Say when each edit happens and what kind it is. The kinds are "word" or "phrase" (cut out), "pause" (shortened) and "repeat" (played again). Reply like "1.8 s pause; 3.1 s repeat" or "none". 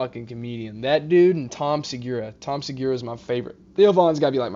none